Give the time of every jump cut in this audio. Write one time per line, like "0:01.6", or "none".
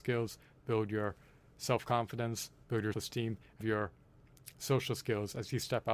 0:02.9
0:03.6